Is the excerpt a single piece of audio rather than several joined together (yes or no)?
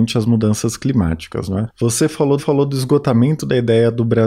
no